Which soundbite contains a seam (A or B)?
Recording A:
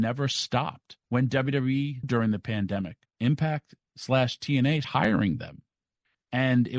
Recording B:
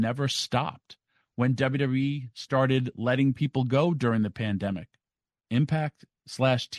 A